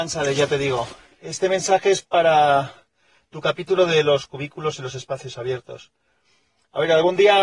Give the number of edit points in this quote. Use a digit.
0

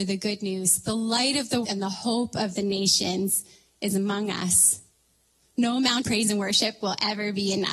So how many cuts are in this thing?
2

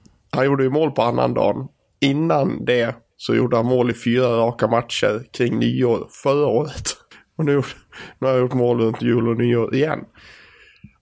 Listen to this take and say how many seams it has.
1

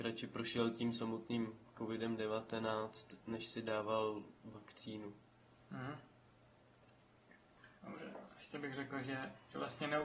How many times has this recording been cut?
1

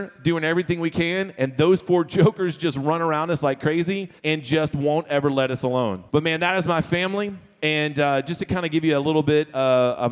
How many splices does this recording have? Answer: 2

